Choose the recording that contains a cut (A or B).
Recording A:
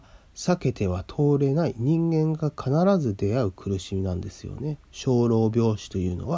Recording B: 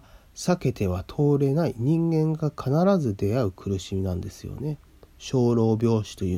A